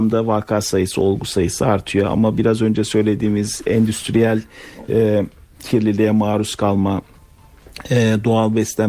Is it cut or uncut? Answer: uncut